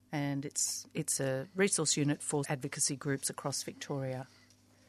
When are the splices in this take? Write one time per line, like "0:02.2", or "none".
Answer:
0:02.4